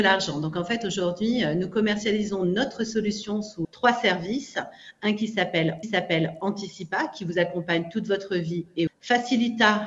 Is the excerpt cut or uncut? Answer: cut